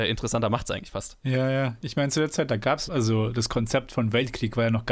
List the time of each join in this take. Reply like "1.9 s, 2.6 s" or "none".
2.9 s